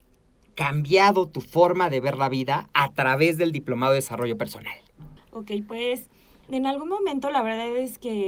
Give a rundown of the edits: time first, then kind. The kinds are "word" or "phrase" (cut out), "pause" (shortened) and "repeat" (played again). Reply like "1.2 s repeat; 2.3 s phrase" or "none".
5.2 s pause; 6.5 s phrase